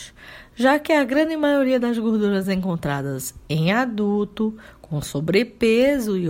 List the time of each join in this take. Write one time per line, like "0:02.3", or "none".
none